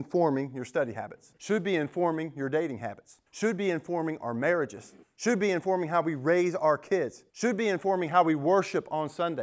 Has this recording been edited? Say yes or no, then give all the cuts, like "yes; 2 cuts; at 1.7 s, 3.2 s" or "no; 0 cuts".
yes; 4 cuts; at 1.4 s, 3.3 s, 5.0 s, 7.3 s